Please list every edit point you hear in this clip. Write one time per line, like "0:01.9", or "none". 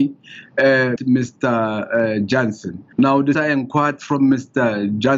0:01.0
0:02.9
0:03.3